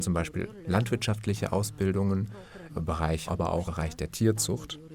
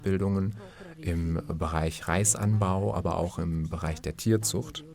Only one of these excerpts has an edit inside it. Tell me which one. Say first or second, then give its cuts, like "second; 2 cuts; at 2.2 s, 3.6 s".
first; 3 cuts; at 2.7 s, 3.3 s, 3.7 s